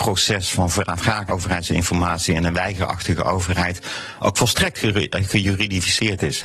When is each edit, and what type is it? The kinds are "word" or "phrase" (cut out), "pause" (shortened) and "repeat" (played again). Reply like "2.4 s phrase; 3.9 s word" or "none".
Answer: 1.3 s word